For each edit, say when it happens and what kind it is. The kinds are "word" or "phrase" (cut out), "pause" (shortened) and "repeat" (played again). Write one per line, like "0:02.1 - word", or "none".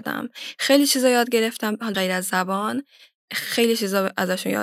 0:01.9 - word